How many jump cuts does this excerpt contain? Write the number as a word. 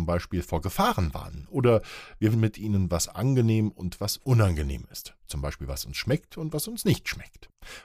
one